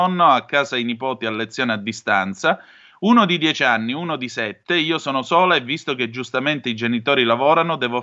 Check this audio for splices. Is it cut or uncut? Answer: uncut